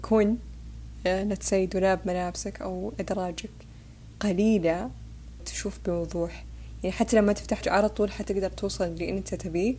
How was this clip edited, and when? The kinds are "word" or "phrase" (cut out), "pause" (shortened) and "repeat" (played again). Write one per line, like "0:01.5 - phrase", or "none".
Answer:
0:04.2 - word
0:05.4 - phrase
0:07.6 - word